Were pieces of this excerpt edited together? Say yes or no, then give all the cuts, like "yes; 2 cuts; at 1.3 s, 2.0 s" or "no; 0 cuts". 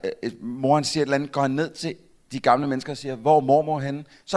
no; 0 cuts